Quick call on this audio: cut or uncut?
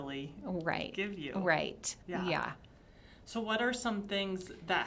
cut